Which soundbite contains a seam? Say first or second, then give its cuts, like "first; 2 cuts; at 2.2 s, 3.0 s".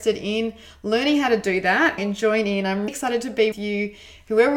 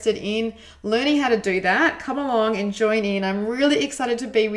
first; 3 cuts; at 2.0 s, 2.9 s, 3.5 s